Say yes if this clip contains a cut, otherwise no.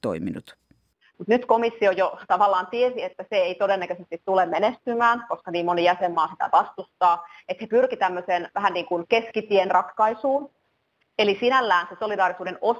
no